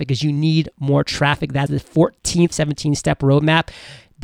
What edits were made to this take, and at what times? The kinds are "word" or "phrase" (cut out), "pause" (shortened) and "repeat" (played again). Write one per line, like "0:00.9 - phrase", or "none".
0:01.7 - word
0:02.5 - phrase